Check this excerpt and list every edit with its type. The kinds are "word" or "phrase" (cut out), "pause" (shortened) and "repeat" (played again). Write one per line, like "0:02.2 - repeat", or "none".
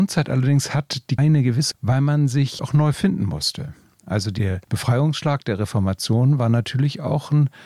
0:01.2 - word
0:01.7 - phrase
0:02.6 - word
0:04.6 - pause